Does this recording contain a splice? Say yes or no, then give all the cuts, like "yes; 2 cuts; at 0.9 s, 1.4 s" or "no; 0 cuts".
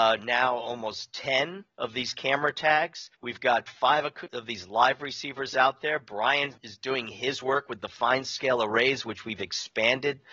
yes; 3 cuts; at 1.7 s, 3.1 s, 6.6 s